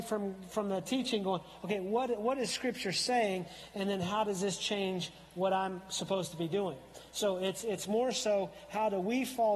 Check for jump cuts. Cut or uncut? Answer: uncut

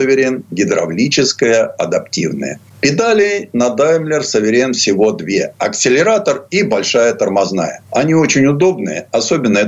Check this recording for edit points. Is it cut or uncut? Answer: cut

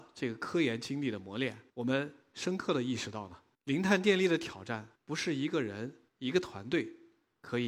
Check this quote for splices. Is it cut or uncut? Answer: cut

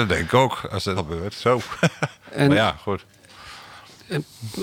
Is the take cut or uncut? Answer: cut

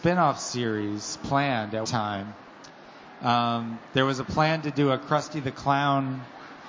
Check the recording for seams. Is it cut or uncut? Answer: cut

